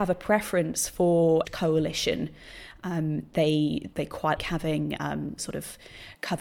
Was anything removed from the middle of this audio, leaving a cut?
yes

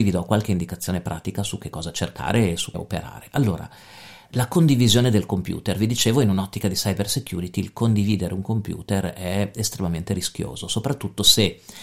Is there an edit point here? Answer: yes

